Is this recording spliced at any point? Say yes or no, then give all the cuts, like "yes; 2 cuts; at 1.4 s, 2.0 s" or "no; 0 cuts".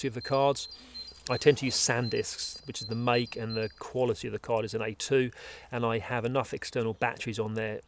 no; 0 cuts